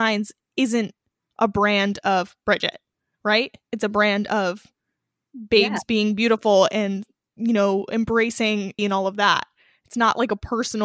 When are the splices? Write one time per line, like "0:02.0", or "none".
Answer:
0:08.8